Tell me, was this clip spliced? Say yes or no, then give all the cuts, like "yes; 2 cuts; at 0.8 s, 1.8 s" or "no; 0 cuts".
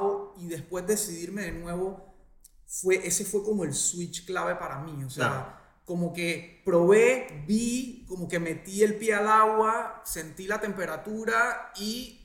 no; 0 cuts